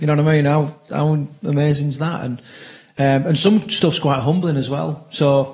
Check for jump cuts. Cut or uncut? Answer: uncut